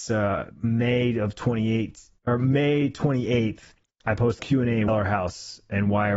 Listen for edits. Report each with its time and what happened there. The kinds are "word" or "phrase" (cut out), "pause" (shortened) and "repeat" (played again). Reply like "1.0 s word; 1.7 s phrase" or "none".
2.2 s pause; 3.9 s pause; 4.4 s word; 4.9 s phrase